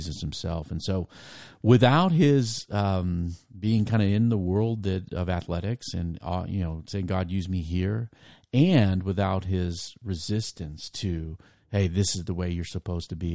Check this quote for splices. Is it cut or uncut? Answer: uncut